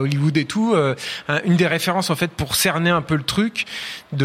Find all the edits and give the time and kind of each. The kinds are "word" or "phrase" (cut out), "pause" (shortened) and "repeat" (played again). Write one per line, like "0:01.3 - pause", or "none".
none